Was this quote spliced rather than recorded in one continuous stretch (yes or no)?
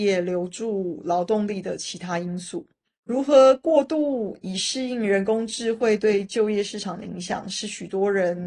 yes